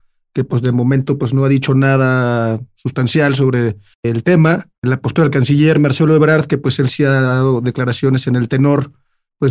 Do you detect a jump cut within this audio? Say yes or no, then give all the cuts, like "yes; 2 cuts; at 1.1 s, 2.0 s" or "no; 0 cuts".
no; 0 cuts